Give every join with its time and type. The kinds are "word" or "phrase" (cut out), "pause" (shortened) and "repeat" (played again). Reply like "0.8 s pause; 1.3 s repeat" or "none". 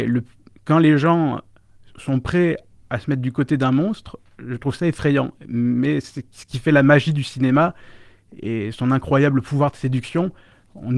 none